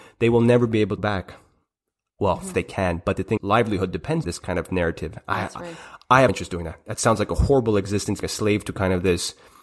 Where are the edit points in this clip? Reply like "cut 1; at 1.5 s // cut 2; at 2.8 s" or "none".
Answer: cut 1; at 1.0 s // cut 2; at 2.5 s // cut 3; at 3.4 s // cut 4; at 4.2 s // cut 5; at 6.3 s // cut 6; at 8.2 s